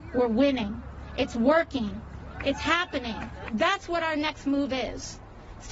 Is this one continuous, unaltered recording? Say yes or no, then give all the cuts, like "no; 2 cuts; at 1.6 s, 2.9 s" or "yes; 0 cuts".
yes; 0 cuts